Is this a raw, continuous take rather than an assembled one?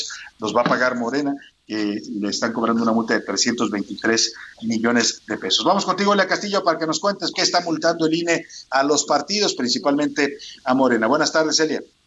no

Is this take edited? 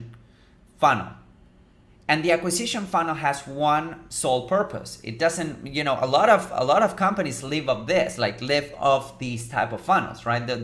no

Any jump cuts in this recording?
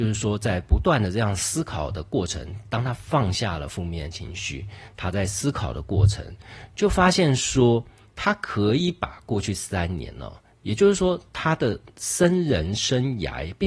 no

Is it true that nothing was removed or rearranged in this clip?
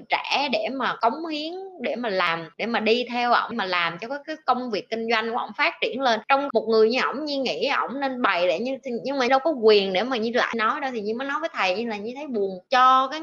no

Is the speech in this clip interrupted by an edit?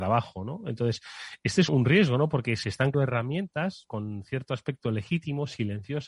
yes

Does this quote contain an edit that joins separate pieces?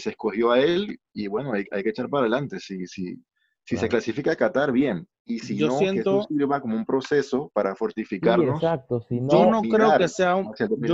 no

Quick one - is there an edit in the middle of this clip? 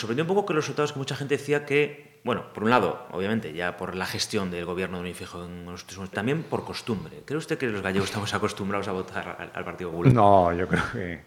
yes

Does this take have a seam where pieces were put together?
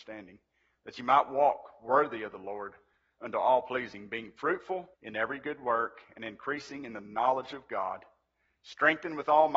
yes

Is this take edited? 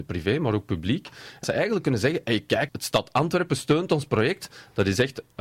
yes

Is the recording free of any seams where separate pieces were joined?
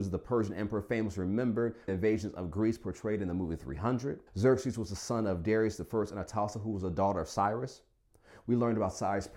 no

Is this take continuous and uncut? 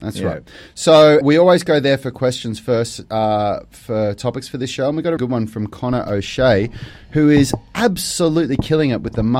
no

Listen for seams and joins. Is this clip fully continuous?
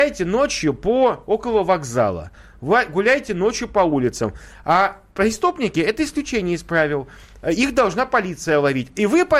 yes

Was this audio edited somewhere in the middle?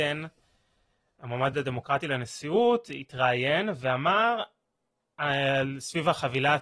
no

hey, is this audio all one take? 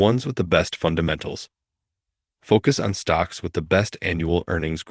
yes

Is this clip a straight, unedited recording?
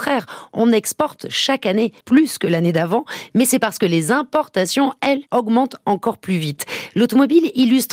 no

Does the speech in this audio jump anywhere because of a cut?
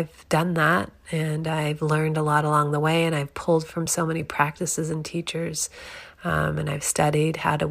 no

